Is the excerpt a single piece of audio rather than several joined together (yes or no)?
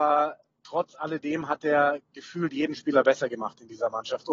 yes